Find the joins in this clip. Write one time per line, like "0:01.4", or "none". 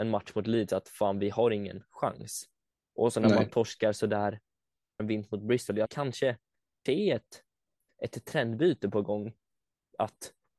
0:02.7
0:05.0
0:05.9
0:06.9